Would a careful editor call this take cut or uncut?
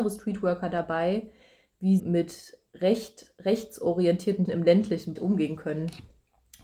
cut